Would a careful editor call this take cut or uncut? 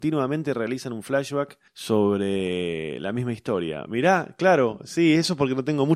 cut